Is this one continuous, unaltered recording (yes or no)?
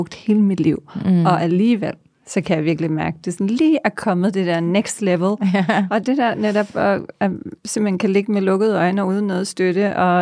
yes